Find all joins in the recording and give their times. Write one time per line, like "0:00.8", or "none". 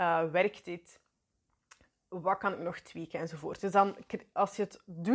none